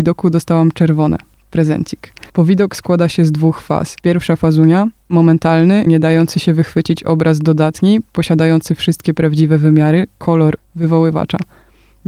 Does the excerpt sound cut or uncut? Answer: cut